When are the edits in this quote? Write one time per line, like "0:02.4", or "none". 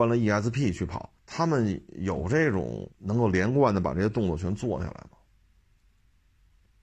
0:01.2
0:02.9